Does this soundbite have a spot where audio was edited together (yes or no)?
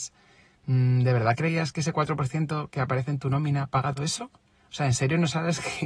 yes